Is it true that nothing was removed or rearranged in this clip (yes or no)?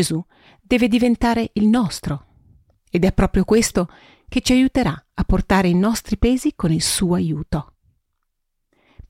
yes